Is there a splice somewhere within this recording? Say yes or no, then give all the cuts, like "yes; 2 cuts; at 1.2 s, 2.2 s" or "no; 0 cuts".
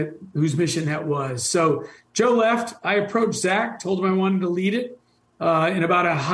no; 0 cuts